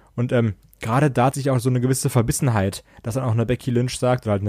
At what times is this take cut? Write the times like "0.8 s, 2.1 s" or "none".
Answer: 1.3 s